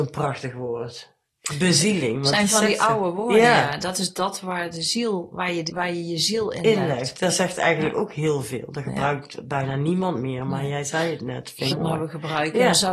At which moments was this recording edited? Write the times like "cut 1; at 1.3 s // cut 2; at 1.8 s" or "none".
cut 1; at 5.7 s // cut 2; at 11.7 s